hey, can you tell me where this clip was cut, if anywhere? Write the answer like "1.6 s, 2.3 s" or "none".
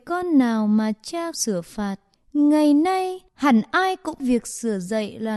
1.3 s, 2.2 s, 3.3 s, 4.2 s